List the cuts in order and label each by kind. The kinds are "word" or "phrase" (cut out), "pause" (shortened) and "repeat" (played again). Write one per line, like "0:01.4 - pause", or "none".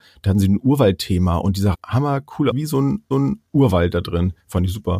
0:01.7 - phrase
0:02.5 - word
0:03.1 - repeat